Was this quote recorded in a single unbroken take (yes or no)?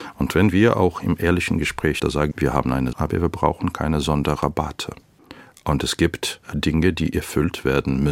no